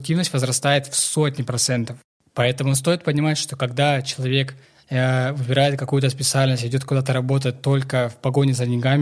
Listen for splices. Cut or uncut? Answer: uncut